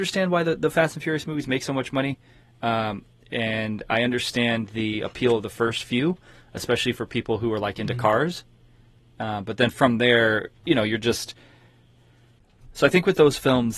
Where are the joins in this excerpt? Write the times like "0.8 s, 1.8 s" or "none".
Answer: none